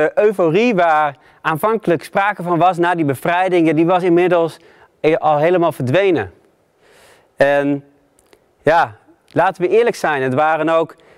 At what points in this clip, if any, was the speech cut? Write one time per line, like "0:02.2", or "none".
none